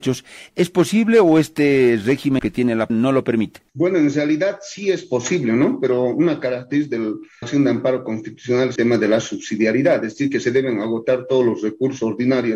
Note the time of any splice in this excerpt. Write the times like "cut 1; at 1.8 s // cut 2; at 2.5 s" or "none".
cut 1; at 2.4 s // cut 2; at 2.9 s // cut 3; at 3.7 s // cut 4; at 7.4 s // cut 5; at 8.8 s